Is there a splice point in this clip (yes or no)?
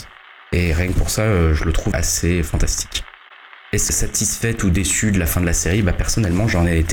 yes